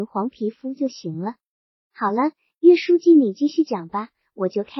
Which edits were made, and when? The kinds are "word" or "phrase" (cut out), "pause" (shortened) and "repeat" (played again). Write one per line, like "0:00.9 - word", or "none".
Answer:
none